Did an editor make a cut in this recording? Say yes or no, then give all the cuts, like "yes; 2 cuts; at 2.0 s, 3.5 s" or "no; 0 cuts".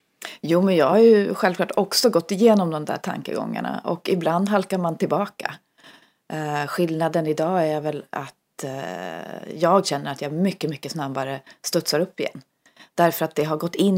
no; 0 cuts